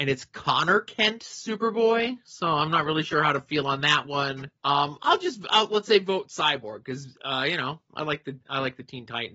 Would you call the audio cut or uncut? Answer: cut